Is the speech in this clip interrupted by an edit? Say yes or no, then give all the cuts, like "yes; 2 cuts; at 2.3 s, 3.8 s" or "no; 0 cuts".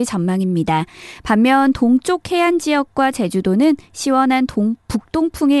no; 0 cuts